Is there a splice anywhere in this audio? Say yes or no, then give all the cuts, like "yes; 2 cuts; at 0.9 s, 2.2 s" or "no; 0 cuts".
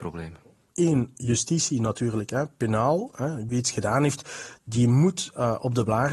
no; 0 cuts